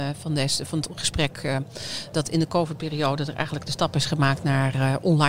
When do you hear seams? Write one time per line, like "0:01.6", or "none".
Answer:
0:02.1